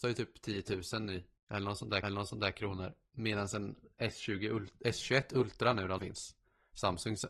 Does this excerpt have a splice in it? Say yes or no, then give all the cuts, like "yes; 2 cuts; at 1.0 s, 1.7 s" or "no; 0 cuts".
yes; 3 cuts; at 1.4 s, 2.0 s, 6.0 s